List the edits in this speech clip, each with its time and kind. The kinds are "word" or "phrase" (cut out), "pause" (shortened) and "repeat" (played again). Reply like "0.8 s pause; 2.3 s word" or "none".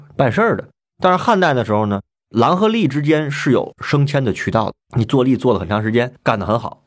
4.8 s pause

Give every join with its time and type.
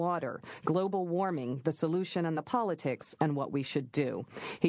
none

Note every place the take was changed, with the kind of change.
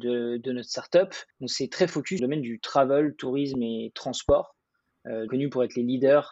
1.3 s pause; 2.2 s phrase; 5.3 s phrase

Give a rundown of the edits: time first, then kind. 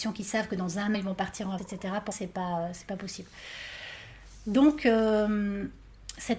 0.9 s word; 1.6 s word; 2.1 s word

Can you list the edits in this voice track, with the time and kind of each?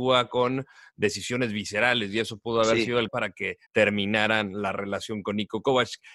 3.1 s word; 3.7 s pause

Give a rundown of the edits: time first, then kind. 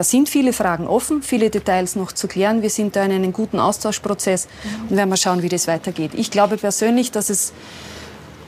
none

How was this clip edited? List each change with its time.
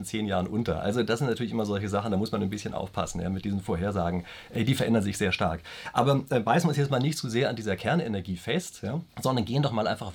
9.1 s pause

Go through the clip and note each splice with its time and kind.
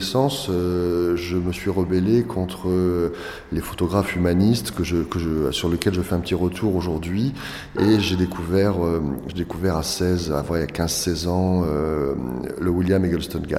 none

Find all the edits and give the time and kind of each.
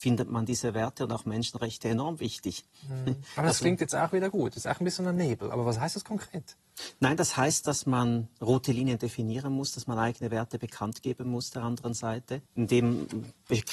12.5 s pause

